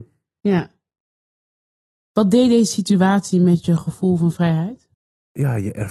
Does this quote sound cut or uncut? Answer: cut